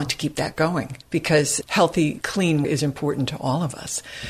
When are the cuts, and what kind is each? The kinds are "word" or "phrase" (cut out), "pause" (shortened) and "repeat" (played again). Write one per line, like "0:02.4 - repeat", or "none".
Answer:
0:01.0 - pause
0:02.6 - word